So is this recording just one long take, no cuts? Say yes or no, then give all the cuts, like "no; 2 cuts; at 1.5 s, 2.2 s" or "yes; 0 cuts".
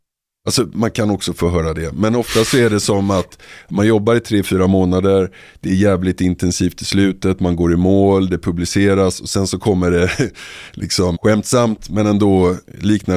no; 1 cut; at 11.1 s